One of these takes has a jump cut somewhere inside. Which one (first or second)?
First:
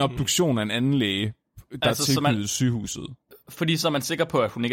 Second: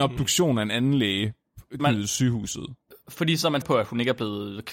second